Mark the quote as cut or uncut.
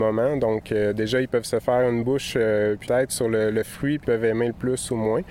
cut